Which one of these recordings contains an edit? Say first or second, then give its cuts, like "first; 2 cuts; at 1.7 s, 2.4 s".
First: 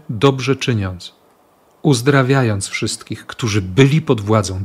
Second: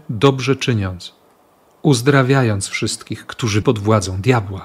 second; 1 cut; at 3.6 s